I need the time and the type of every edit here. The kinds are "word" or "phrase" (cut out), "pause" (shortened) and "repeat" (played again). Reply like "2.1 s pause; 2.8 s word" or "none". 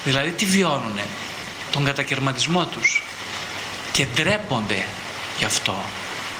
none